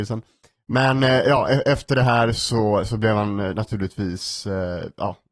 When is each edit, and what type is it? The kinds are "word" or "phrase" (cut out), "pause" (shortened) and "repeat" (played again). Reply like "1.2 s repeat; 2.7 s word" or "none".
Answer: none